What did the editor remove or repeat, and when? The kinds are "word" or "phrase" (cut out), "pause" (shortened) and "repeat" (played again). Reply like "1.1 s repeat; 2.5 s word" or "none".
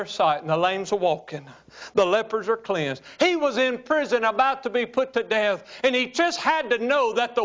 none